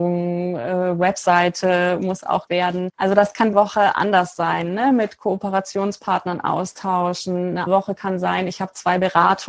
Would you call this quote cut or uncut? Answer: cut